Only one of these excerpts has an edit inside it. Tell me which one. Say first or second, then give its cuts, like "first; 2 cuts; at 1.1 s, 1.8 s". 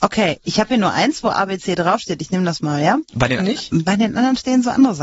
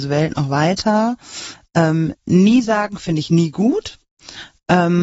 first; 1 cut; at 3.4 s